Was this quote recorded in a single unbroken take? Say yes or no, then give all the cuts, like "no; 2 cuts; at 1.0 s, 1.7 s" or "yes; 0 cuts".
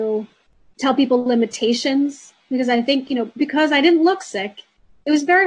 yes; 0 cuts